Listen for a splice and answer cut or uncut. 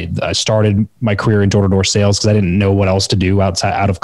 uncut